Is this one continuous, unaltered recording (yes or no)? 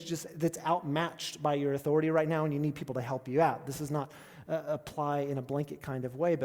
yes